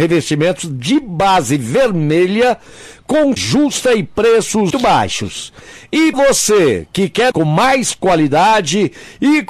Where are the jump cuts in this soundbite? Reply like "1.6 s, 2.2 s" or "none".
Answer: 3.4 s, 4.7 s, 6.1 s, 7.3 s